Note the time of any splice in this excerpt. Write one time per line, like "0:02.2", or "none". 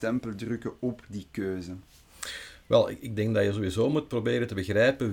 none